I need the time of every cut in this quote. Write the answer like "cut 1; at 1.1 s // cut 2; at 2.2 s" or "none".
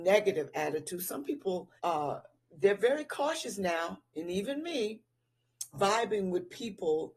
cut 1; at 1.8 s // cut 2; at 5.7 s

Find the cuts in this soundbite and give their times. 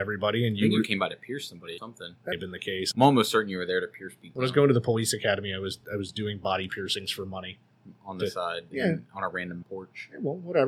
cut 1; at 1.8 s // cut 2; at 2.3 s // cut 3; at 2.9 s // cut 4; at 9.6 s

